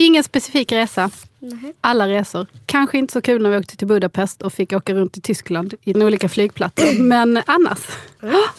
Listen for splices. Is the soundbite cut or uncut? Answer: cut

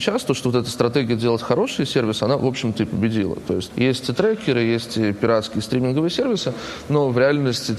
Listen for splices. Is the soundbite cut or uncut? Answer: uncut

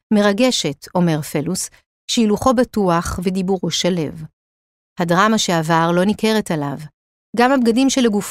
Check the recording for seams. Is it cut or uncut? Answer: uncut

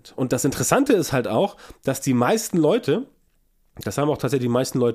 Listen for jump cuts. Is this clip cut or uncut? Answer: uncut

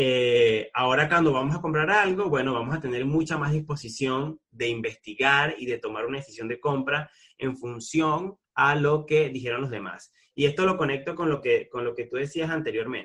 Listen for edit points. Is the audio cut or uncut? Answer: cut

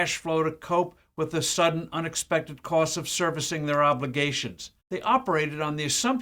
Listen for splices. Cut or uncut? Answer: cut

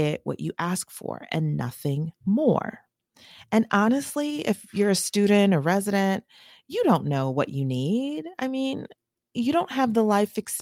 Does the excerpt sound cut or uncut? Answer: uncut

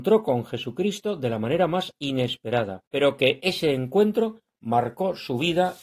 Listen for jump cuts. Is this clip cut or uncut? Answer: cut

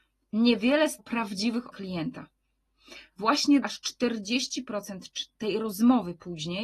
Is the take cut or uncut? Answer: cut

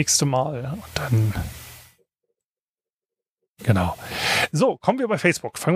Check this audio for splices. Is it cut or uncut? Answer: uncut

